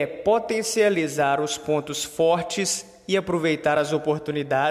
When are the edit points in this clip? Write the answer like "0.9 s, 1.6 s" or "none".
none